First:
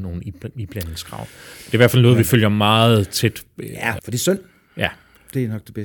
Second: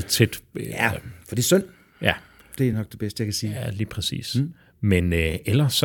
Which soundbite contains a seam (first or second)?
first